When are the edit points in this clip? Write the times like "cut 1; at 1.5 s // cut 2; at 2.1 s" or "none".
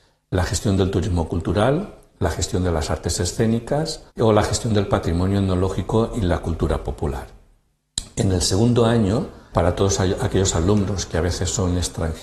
cut 1; at 4.1 s // cut 2; at 9.5 s

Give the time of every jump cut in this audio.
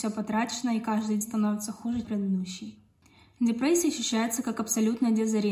cut 1; at 1.2 s // cut 2; at 2.0 s

